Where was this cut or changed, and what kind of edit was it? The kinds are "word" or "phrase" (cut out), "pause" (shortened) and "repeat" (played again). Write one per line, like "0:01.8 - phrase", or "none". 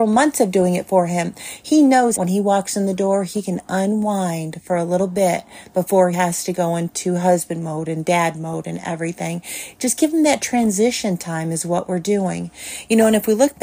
0:02.2 - word
0:06.1 - word